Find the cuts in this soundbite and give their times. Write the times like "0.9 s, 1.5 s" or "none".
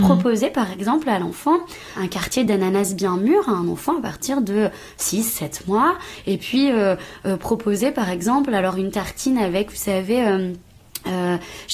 none

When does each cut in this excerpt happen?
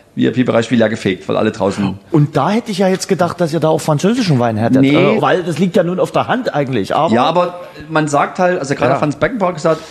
5.2 s

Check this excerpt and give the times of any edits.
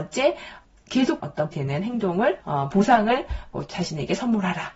1.2 s, 1.5 s, 2.4 s

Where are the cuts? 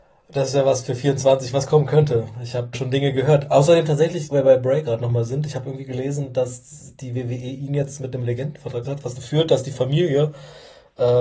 2.7 s, 4.3 s, 8.8 s, 9.2 s

